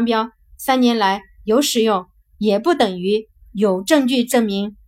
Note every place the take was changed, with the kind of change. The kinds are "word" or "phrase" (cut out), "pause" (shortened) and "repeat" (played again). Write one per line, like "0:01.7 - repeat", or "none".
none